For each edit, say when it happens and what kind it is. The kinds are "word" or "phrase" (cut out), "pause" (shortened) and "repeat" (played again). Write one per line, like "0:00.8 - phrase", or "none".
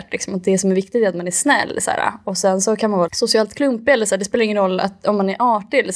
0:03.1 - word